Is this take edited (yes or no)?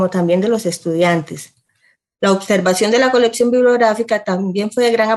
no